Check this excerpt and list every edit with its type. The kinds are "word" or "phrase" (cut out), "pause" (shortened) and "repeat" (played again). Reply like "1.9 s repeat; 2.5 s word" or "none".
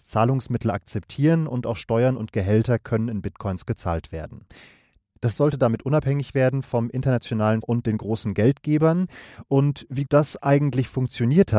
5.3 s word; 7.6 s word; 10.1 s word

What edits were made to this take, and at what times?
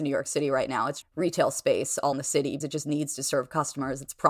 1.0 s phrase; 2.1 s word; 2.6 s word

